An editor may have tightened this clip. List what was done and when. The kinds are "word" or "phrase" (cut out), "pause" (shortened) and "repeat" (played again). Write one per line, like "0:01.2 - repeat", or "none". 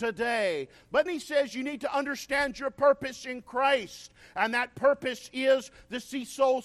0:01.1 - word